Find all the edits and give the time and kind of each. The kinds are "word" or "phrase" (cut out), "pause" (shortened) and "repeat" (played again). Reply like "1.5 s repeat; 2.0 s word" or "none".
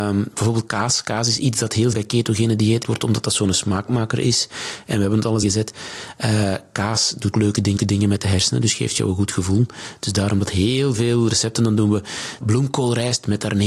1.9 s word; 2.8 s word; 5.4 s phrase; 7.3 s word; 7.8 s repeat; 12.4 s phrase